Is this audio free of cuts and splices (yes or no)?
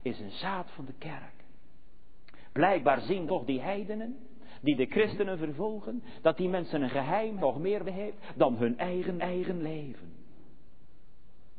no